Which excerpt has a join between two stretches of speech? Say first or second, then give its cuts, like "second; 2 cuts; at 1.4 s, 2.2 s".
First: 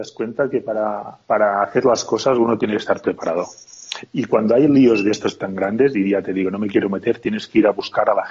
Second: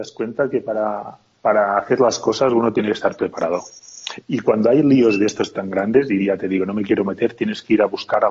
first; 1 cut; at 1.2 s